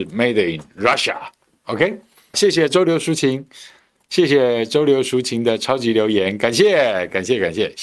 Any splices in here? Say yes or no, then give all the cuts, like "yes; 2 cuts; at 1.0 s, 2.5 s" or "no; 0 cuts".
yes; 1 cut; at 2.3 s